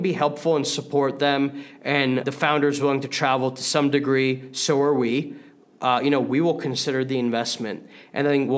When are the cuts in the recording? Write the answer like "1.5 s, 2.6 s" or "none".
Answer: none